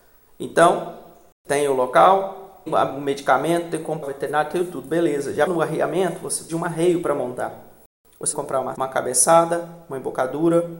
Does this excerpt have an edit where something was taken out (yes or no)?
yes